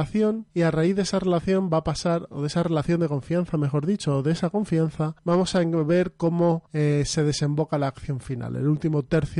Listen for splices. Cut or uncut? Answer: uncut